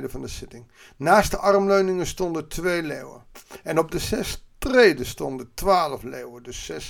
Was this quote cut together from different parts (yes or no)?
no